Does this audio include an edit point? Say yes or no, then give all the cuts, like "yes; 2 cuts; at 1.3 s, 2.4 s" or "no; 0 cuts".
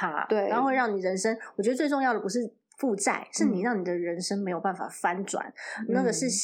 no; 0 cuts